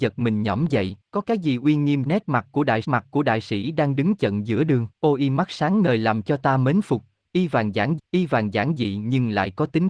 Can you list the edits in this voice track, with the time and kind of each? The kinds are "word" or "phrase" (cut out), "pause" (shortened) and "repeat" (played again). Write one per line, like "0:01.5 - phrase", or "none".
0:01.0 - pause
0:02.1 - word
0:02.8 - repeat
0:04.9 - pause
0:08.0 - repeat